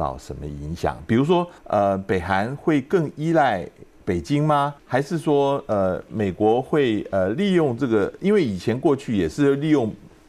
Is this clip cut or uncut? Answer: cut